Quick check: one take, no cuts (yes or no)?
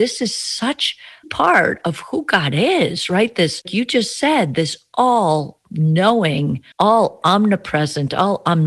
no